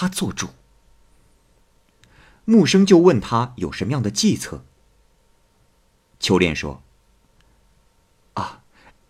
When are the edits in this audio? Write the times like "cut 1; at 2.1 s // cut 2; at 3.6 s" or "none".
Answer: none